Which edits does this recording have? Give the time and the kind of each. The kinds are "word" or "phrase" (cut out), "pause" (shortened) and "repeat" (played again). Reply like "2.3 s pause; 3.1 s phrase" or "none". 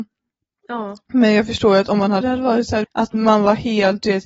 2.2 s phrase; 2.8 s phrase

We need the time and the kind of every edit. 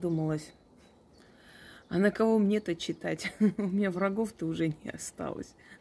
none

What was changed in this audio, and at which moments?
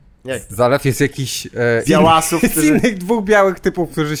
0.9 s phrase; 1.8 s phrase

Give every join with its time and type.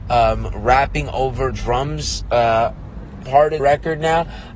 1.5 s word; 3.2 s phrase; 3.6 s word

